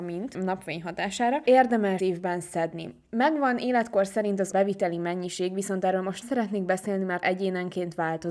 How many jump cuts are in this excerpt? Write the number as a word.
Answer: four